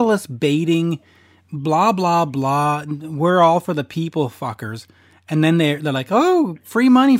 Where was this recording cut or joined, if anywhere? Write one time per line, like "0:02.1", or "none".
none